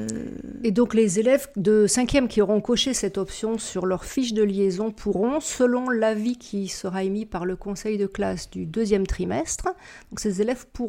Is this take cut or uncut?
uncut